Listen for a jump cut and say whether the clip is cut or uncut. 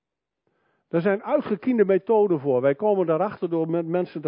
uncut